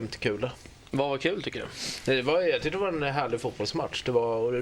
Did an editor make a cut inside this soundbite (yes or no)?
no